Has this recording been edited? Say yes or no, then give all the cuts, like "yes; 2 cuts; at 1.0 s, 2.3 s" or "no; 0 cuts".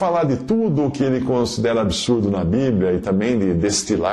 no; 0 cuts